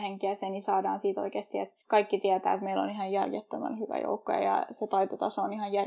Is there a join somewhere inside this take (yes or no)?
yes